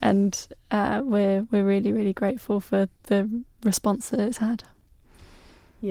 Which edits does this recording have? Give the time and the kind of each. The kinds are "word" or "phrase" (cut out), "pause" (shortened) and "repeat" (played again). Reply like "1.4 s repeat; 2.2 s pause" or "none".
none